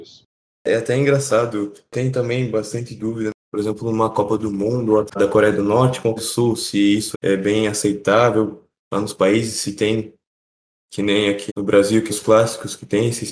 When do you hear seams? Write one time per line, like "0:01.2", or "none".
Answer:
0:05.1
0:06.2
0:07.1
0:11.5
0:12.1